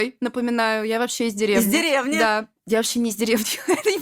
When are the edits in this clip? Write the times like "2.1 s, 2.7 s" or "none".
none